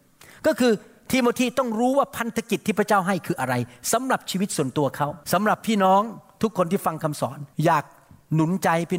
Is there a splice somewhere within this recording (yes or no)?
yes